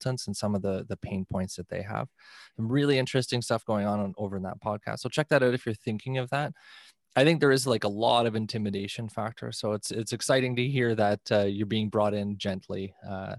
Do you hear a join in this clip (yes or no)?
no